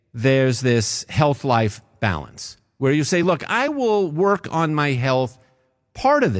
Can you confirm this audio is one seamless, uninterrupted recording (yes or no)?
yes